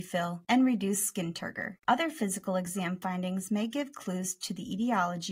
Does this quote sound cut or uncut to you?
uncut